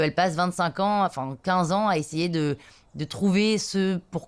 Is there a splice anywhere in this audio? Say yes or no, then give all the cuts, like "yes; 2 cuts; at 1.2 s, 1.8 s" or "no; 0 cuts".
no; 0 cuts